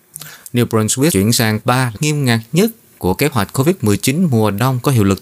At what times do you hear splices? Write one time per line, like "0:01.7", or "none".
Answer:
0:01.1
0:01.6
0:02.0